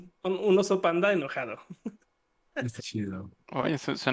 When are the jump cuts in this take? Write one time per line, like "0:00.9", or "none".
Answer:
0:02.8